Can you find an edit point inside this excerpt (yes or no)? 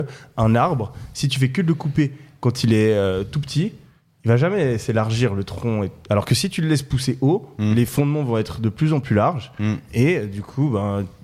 no